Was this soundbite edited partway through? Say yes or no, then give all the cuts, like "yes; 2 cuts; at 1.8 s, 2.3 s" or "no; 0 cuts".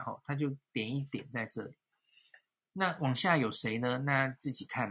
no; 0 cuts